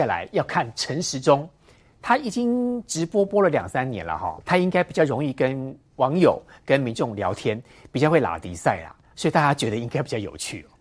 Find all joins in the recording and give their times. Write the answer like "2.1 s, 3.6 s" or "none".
4.4 s, 5.9 s